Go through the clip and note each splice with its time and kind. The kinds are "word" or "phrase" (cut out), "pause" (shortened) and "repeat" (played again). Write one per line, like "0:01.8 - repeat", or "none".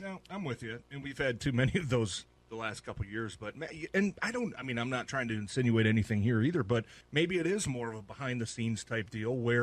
0:02.4 - word
0:07.0 - pause